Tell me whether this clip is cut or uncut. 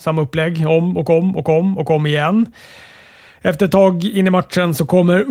uncut